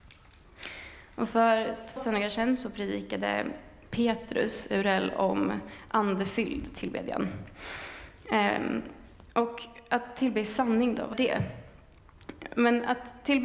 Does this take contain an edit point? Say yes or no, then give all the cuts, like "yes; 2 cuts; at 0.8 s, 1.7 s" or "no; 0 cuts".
yes; 2 cuts; at 2.0 s, 11.1 s